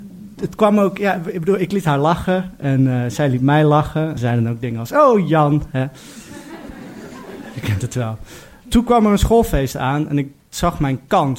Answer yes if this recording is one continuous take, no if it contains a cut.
no